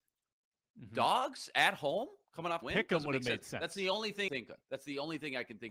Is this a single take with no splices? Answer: no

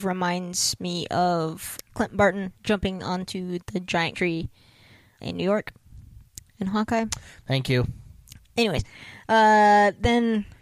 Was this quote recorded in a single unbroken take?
no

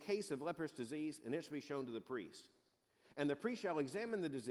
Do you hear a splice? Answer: no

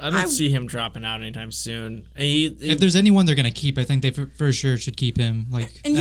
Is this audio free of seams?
yes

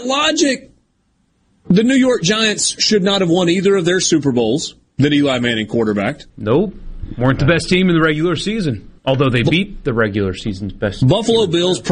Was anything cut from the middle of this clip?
yes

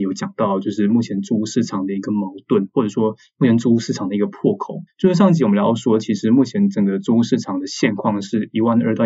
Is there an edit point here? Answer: yes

